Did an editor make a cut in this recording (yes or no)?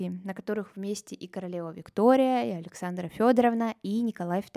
no